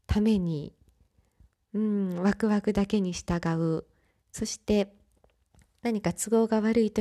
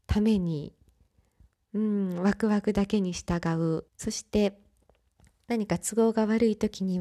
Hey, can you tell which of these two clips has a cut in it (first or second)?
second